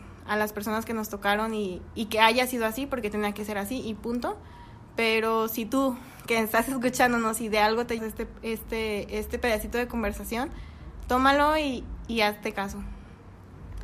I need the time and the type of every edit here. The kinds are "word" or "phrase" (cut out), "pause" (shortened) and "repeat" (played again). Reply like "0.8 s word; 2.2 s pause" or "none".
8.0 s word